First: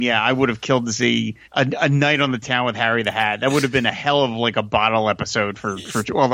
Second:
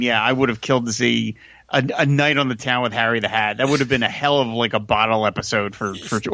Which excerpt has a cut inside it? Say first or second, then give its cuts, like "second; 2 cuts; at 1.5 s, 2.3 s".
first; 1 cut; at 1.4 s